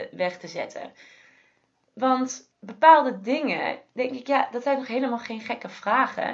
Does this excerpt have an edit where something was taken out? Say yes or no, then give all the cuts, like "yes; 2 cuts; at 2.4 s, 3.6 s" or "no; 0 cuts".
no; 0 cuts